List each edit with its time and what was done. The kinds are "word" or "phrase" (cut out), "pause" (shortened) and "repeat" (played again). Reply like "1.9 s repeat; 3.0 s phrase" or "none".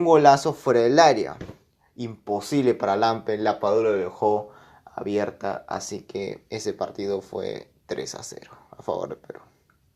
none